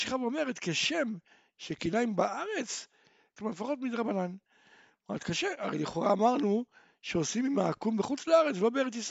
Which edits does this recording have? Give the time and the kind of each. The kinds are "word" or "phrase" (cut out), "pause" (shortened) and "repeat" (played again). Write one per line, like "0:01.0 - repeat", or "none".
0:03.4 - phrase